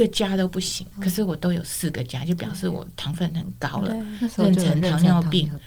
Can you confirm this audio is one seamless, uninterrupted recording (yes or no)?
no